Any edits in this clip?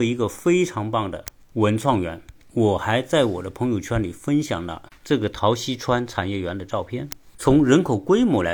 no; 0 cuts

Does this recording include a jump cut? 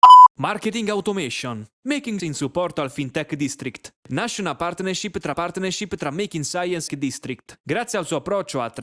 yes; 4 cuts; at 2.2 s, 4.0 s, 5.3 s, 6.9 s

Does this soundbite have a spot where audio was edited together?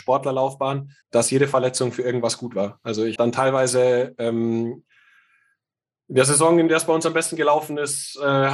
yes; 2 cuts; at 1.0 s, 3.2 s

